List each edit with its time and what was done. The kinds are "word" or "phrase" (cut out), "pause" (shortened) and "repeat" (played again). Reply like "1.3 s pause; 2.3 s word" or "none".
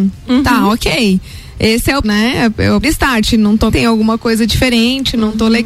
2.0 s phrase; 2.8 s word; 3.7 s phrase